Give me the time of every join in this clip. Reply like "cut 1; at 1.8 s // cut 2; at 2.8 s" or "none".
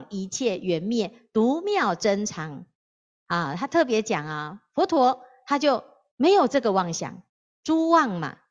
none